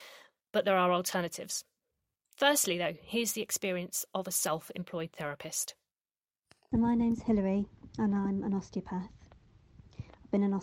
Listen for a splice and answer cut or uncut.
uncut